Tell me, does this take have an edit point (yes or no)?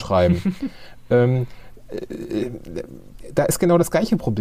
no